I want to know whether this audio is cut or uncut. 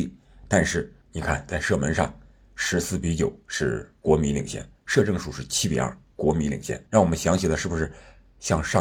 cut